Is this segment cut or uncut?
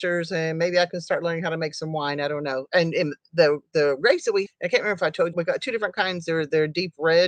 cut